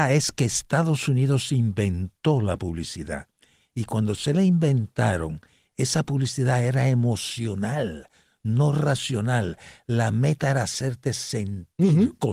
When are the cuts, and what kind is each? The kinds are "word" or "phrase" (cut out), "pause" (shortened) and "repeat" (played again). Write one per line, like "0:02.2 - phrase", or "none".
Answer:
none

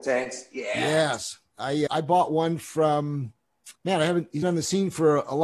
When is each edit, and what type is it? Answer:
0:01.9 - word
0:03.8 - pause
0:04.4 - phrase

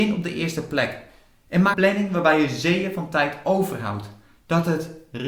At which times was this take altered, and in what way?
0:01.7 - word

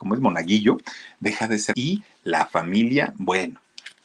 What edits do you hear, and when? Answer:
0:01.7 - word

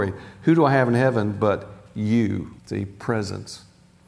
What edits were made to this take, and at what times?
0:02.6 - pause

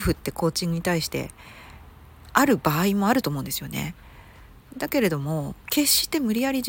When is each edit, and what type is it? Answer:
none

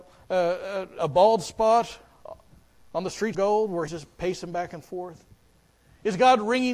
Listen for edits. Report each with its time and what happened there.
0:01.0 - word
0:03.3 - word
0:03.9 - word

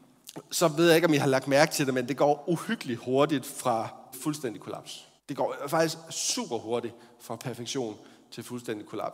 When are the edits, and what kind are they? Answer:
0:04.1 - phrase
0:05.2 - pause

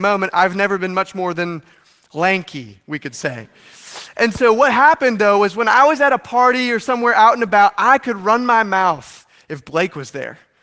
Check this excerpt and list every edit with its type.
none

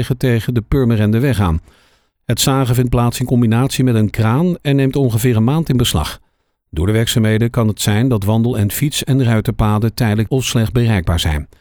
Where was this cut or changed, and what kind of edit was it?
0:10.3 - word

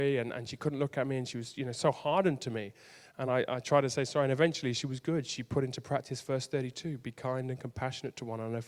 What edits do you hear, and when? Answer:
none

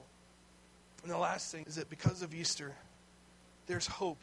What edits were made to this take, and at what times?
0:01.6 - word

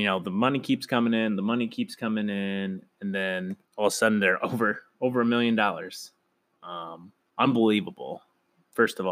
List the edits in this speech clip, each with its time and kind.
0:03.6 - pause
0:04.9 - pause
0:07.2 - pause

